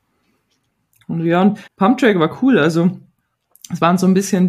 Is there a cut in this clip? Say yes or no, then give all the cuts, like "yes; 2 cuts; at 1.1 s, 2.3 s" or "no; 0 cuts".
yes; 1 cut; at 1.7 s